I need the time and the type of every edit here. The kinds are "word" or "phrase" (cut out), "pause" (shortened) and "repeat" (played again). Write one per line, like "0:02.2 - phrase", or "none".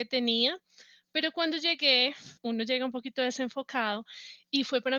0:02.4 - pause